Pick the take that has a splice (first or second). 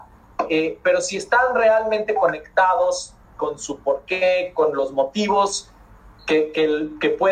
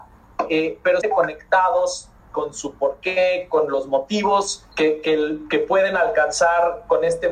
second